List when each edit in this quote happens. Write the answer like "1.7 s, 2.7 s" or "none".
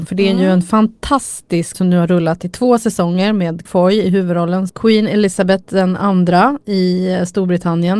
1.7 s, 3.7 s, 4.7 s